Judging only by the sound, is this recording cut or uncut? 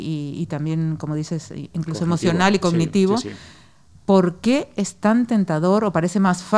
uncut